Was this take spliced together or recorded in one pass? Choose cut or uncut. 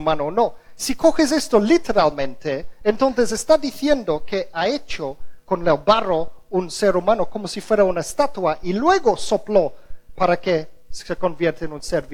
uncut